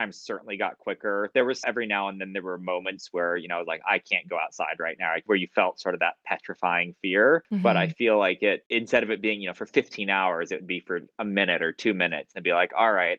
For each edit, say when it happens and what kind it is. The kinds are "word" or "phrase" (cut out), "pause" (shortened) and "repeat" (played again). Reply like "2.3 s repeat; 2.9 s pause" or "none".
1.6 s word